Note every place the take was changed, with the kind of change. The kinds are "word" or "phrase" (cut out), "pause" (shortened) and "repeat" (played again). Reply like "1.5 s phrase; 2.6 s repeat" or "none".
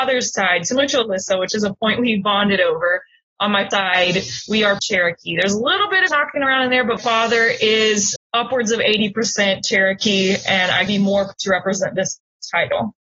3.7 s word; 4.8 s word; 6.1 s word; 7.0 s word; 8.2 s word; 10.9 s word; 11.3 s word